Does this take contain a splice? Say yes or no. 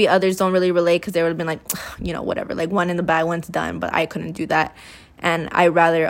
no